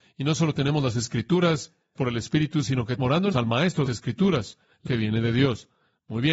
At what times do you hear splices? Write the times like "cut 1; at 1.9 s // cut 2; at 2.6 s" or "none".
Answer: cut 1; at 2.0 s // cut 2; at 3.0 s // cut 3; at 3.3 s // cut 4; at 3.9 s // cut 5; at 4.9 s